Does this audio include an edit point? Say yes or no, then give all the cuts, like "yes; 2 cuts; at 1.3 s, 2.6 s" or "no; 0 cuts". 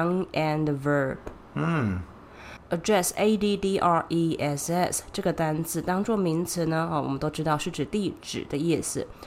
yes; 1 cut; at 2.6 s